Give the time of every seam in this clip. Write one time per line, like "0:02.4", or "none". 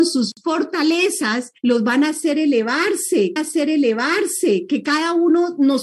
0:01.6
0:03.4